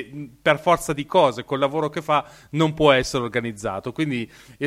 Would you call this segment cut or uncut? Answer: uncut